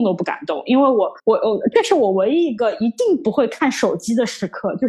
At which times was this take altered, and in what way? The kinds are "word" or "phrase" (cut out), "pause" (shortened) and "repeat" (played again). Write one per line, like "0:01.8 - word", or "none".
0:01.2 - pause